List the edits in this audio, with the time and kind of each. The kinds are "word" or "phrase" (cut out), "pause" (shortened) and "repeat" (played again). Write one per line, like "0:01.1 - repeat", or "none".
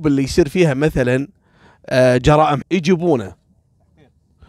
0:02.6 - word